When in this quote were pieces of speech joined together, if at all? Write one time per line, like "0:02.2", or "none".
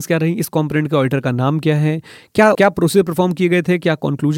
0:02.5